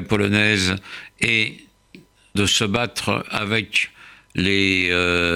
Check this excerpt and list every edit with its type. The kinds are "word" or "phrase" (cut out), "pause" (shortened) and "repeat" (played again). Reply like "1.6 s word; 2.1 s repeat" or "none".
2.3 s word